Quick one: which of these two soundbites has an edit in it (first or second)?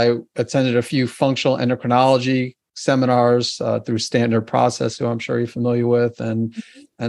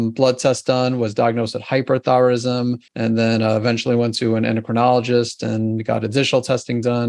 second